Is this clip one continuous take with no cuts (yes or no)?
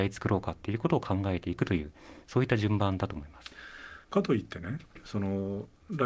no